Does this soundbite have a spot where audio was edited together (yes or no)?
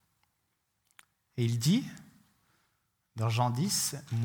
no